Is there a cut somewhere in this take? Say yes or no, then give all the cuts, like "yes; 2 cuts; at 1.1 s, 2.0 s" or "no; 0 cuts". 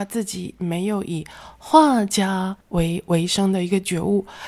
yes; 1 cut; at 2.6 s